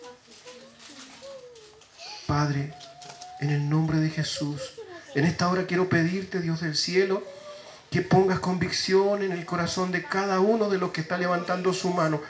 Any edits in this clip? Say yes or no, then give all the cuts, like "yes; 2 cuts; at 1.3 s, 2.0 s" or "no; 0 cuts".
no; 0 cuts